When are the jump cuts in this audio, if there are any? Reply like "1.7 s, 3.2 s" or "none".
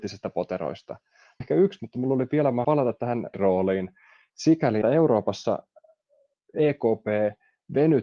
1.4 s, 1.8 s, 2.6 s, 3.3 s, 4.8 s